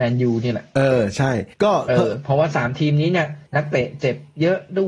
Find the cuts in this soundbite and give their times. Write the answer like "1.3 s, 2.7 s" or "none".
1.5 s, 3.5 s